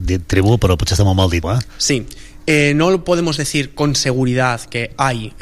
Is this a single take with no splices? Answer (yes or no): no